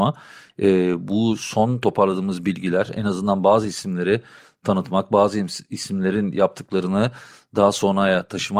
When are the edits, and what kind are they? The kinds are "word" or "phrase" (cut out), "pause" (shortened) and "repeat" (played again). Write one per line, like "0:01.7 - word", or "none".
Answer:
none